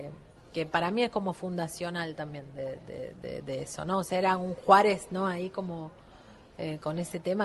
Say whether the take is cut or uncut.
uncut